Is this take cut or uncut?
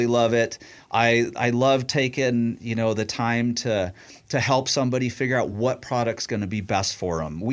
uncut